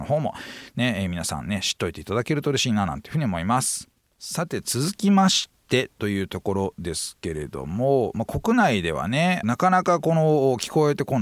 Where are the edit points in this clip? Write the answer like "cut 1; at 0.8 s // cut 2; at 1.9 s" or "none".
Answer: cut 1; at 4.0 s